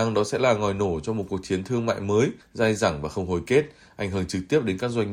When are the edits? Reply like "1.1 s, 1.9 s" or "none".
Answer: none